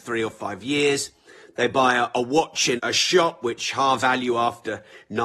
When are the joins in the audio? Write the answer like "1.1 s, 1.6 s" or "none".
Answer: 2.8 s, 4.0 s